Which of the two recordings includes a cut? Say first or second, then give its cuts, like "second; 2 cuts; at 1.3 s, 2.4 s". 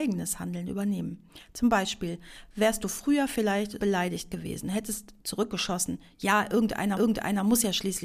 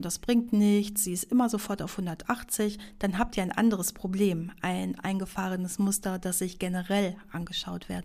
first; 3 cuts; at 3.8 s, 5.2 s, 6.9 s